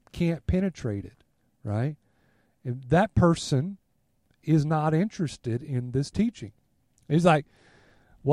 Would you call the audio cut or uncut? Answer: uncut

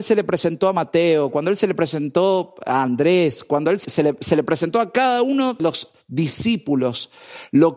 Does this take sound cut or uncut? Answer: cut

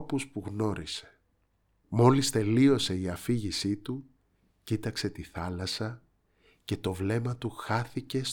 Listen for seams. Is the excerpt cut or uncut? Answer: uncut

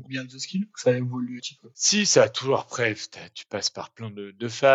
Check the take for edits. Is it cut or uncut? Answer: cut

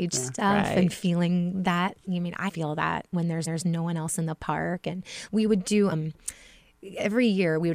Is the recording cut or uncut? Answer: cut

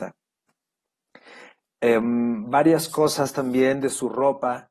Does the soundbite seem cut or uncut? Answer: uncut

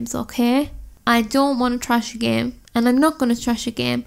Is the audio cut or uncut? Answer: cut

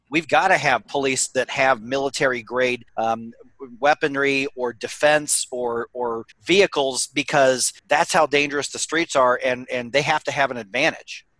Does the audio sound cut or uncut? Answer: cut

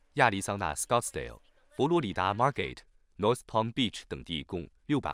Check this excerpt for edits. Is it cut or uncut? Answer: uncut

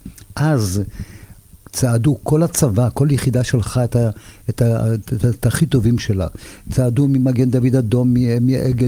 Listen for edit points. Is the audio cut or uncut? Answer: uncut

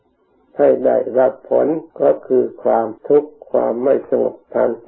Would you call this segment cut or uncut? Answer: cut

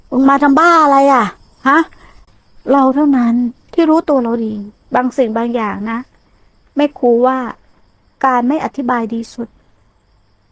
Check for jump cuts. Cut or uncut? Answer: uncut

